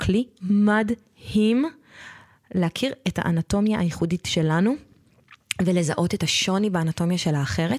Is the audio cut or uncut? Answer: uncut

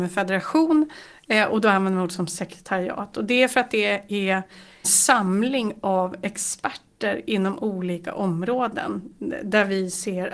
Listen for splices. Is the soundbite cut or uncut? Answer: cut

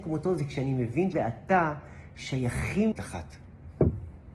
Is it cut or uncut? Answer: cut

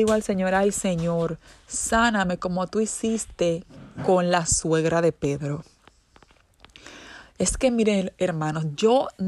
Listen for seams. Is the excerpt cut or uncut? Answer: uncut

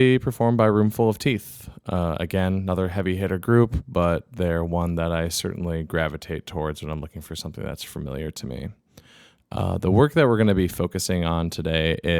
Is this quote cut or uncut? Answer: uncut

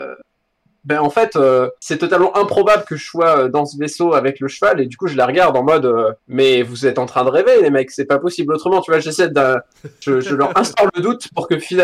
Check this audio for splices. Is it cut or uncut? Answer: cut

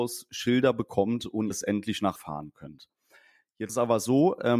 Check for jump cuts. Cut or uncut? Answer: cut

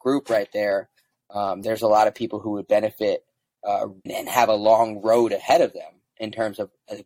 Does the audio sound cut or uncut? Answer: cut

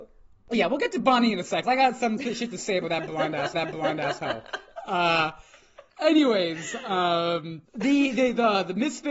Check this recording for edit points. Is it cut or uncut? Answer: cut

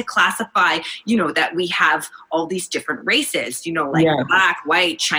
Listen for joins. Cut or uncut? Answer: uncut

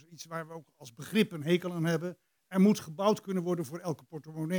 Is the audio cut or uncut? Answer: uncut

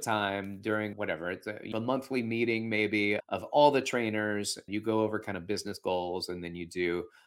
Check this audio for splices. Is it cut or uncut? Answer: cut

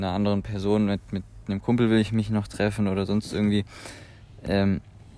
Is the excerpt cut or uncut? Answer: uncut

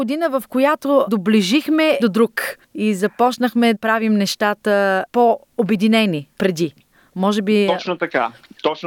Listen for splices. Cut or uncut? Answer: cut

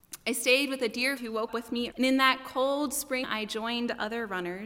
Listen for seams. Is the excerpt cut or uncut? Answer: cut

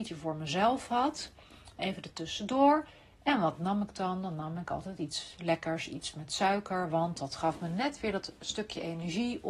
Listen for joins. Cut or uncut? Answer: uncut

